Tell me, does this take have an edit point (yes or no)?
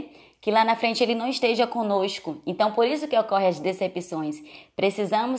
no